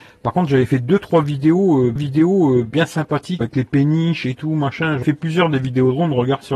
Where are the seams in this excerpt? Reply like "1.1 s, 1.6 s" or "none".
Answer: 2.0 s, 3.4 s, 5.0 s